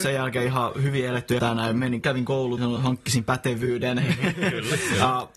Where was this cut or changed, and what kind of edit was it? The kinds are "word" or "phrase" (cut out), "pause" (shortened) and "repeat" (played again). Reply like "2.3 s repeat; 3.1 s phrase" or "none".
1.4 s word; 2.0 s word; 2.6 s word